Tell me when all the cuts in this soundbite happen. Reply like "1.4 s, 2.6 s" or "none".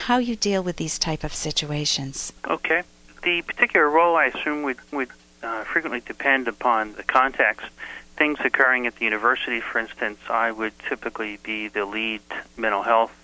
2.4 s, 4.9 s